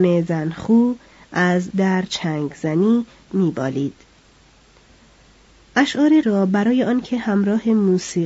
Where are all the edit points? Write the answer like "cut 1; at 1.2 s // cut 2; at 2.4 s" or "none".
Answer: cut 1; at 1.7 s // cut 2; at 3.3 s // cut 3; at 6.2 s